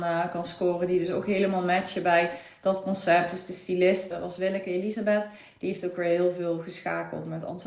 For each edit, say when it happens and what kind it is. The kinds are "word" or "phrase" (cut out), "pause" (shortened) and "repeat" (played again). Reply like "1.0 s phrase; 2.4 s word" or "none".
4.1 s word